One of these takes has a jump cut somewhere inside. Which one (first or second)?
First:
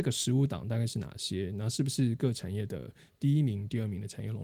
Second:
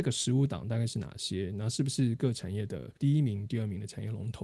second